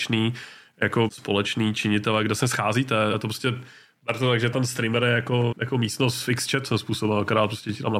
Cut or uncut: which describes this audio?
cut